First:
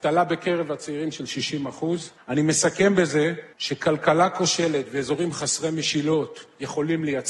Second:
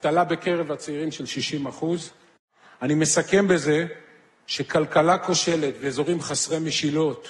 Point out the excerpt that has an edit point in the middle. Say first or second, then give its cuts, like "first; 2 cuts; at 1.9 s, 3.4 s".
first; 2 cuts; at 2.2 s, 3.5 s